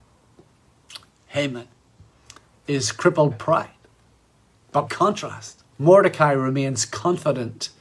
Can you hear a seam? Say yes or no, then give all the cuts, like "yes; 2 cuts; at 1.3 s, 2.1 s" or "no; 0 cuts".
yes; 3 cuts; at 3.3 s, 4.9 s, 5.7 s